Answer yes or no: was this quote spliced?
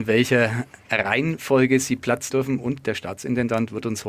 yes